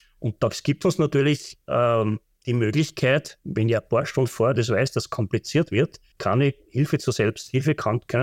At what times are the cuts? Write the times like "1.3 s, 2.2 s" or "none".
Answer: 6.1 s